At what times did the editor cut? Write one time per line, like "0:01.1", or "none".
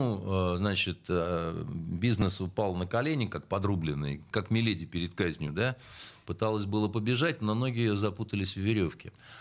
0:04.3

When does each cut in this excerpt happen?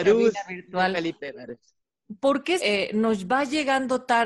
0:02.6

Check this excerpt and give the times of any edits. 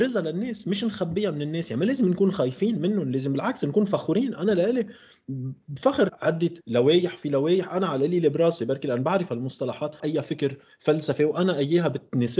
0:06.1
0:06.6
0:10.0

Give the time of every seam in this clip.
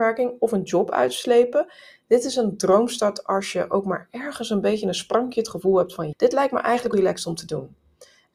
0:06.1
0:06.9

